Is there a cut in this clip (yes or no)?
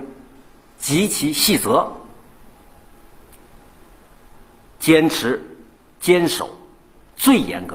no